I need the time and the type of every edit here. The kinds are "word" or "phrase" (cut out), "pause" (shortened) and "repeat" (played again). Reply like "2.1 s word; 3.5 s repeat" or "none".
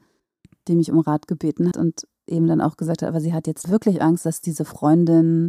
1.7 s word; 3.6 s word